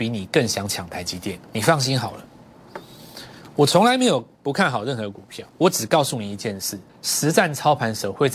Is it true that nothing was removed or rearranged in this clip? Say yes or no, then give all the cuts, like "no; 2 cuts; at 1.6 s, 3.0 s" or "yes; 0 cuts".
no; 2 cuts; at 5.5 s, 6.9 s